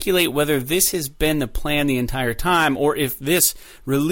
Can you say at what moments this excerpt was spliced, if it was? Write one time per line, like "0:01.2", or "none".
none